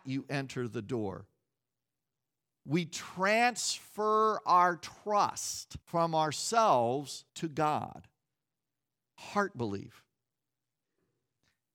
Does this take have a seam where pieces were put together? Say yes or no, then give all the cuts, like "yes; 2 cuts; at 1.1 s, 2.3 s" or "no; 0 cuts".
yes; 2 cuts; at 5.8 s, 7.3 s